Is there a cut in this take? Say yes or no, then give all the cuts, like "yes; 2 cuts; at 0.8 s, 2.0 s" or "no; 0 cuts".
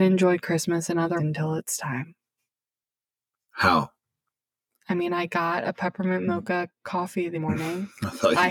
yes; 2 cuts; at 1.2 s, 7.3 s